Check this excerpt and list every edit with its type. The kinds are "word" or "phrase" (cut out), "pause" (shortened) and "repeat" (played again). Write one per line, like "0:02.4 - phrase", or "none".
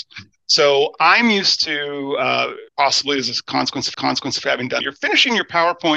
0:02.7 - pause
0:03.9 - repeat
0:04.8 - phrase